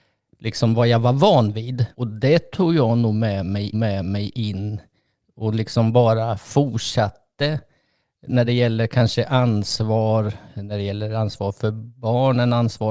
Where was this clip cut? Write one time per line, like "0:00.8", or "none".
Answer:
0:01.9
0:03.7
0:08.5